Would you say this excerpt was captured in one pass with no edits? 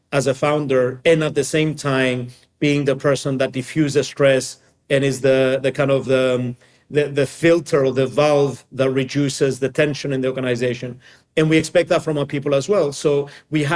yes; 0 cuts

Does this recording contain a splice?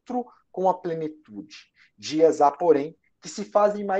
no; 0 cuts

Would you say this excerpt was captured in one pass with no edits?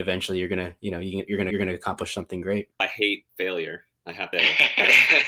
no; 3 cuts; at 1.5 s, 2.7 s, 4.3 s

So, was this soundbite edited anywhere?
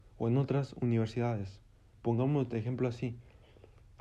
no; 0 cuts

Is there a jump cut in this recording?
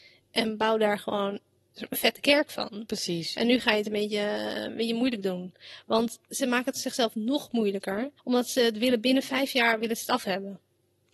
yes; 2 cuts; at 1.6 s, 8.2 s

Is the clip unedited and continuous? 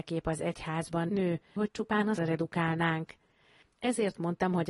no; 3 cuts; at 1.1 s, 1.6 s, 2.2 s

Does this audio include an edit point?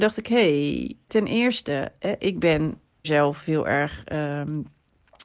yes; 2 cuts; at 1.1 s, 3.0 s

